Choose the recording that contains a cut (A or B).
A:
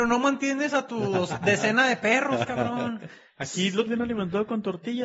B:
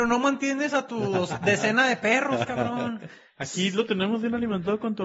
A